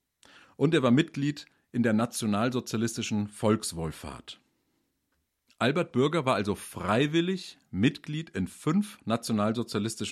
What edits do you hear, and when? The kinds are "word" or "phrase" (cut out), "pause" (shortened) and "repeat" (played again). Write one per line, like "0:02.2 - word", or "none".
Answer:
none